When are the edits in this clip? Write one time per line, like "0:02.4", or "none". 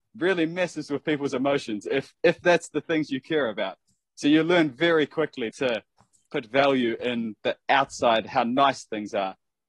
0:05.5

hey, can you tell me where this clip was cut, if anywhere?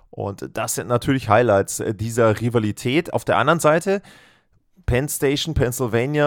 none

